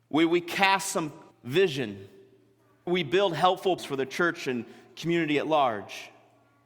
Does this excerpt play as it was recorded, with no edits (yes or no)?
no